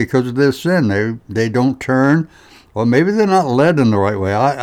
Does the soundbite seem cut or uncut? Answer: uncut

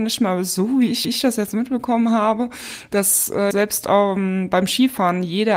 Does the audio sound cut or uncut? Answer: cut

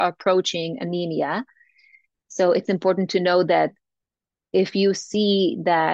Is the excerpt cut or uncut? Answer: uncut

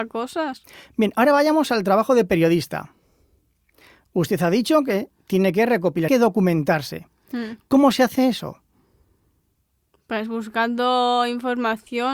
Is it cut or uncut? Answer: cut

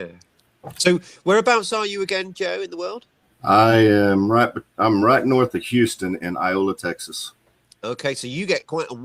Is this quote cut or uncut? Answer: uncut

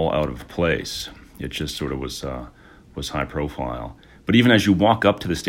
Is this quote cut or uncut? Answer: uncut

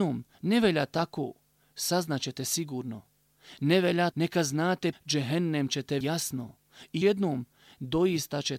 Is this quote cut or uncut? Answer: cut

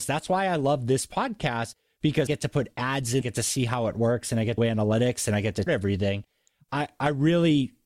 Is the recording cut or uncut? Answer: cut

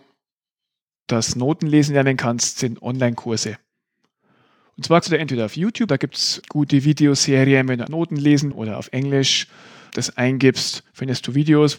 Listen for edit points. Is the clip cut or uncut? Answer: cut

